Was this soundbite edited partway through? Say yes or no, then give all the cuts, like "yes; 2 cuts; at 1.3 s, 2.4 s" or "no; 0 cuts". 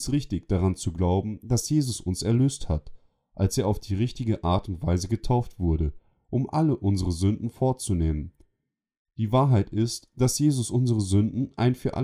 no; 0 cuts